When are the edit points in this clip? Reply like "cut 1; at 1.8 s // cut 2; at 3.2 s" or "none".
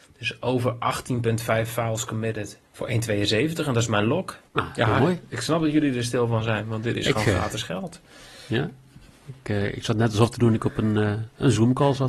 cut 1; at 2.6 s // cut 2; at 4.5 s